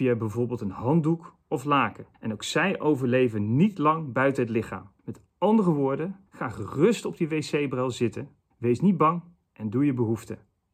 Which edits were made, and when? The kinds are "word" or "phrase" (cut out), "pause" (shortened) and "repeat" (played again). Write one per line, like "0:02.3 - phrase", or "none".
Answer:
0:02.1 - pause
0:05.0 - pause
0:06.3 - pause
0:08.5 - pause